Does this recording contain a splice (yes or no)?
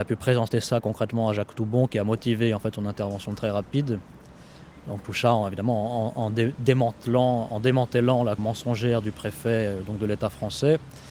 yes